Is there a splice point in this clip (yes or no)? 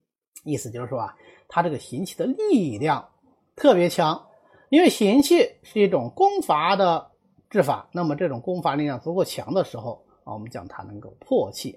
no